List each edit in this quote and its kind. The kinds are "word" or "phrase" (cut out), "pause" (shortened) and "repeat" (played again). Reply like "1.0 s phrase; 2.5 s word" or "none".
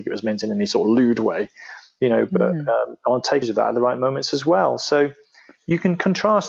3.4 s word